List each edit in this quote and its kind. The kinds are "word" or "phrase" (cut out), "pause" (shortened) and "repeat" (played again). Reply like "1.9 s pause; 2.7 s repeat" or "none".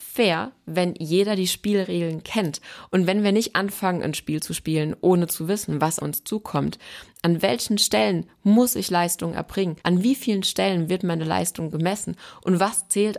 6.0 s word; 9.8 s pause